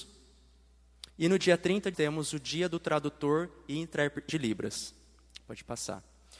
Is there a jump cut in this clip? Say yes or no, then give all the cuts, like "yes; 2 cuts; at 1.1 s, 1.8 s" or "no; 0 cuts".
yes; 3 cuts; at 1.1 s, 1.9 s, 4.3 s